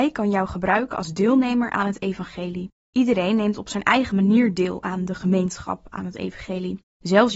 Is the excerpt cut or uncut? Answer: uncut